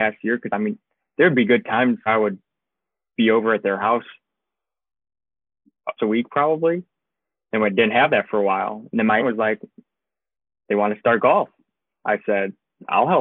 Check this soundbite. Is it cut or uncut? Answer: cut